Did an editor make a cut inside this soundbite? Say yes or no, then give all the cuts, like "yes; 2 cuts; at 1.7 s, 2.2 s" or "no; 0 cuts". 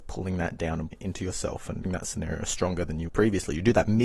yes; 3 cuts; at 0.9 s, 1.8 s, 3.1 s